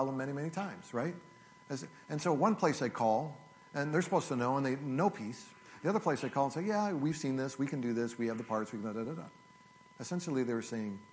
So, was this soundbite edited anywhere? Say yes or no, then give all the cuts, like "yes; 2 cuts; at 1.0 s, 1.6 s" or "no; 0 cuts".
no; 0 cuts